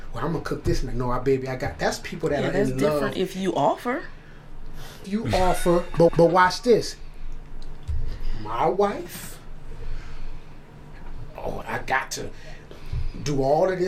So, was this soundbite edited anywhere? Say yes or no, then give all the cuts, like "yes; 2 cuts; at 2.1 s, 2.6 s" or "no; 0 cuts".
yes; 3 cuts; at 5.0 s, 6.1 s, 11.6 s